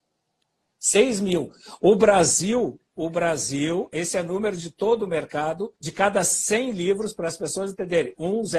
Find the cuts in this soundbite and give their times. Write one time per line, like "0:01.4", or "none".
0:05.8

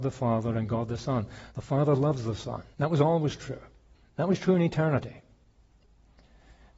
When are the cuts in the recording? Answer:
0:01.5
0:02.7
0:03.9

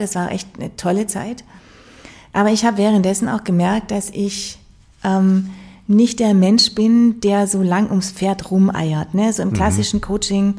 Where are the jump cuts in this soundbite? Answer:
none

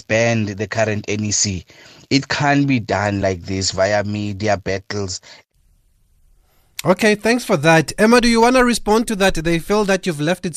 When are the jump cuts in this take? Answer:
none

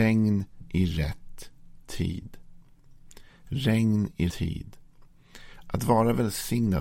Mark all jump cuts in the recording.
0:04.3

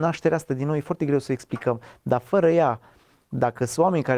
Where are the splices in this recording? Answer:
none

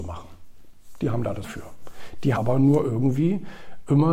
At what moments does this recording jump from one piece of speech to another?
0:01.4
0:02.4

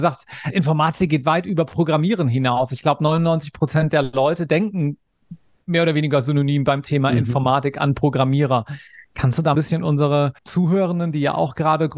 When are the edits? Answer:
0:09.5
0:10.4

